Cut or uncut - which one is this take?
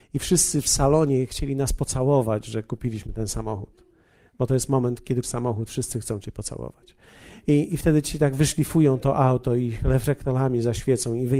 cut